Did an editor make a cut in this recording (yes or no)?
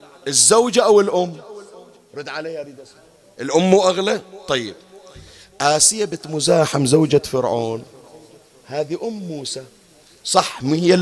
yes